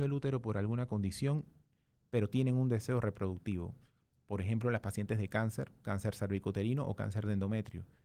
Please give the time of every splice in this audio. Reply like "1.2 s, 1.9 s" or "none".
none